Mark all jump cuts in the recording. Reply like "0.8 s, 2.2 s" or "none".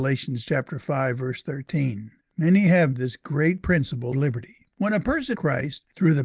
2.2 s, 2.9 s, 4.1 s, 4.7 s, 5.3 s